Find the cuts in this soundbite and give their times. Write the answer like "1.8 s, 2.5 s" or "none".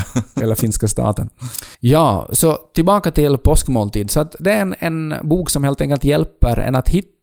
1.7 s